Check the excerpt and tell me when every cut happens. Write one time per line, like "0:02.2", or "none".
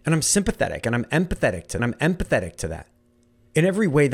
0:01.8